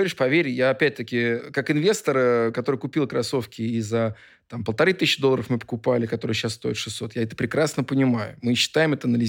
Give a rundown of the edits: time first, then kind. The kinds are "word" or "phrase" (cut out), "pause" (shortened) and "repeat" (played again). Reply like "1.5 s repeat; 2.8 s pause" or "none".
none

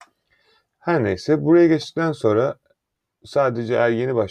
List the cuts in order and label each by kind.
none

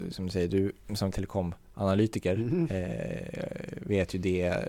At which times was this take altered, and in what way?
1.1 s word

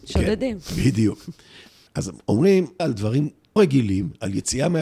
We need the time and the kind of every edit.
1.9 s word; 2.8 s word; 3.6 s word

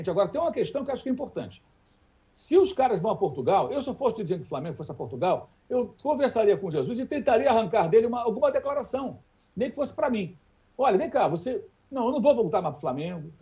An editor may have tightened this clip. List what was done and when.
none

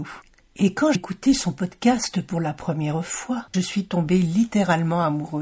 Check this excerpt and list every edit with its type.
0.9 s word; 3.5 s word

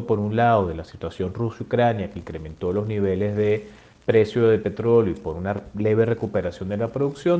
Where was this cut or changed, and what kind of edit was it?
none

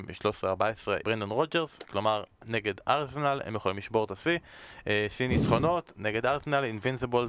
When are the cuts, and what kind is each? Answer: 1.0 s word

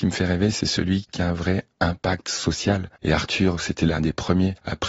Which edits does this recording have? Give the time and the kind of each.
none

